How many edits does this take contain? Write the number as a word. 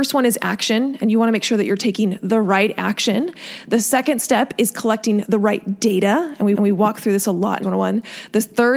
two